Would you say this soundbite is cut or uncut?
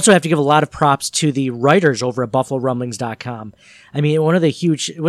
uncut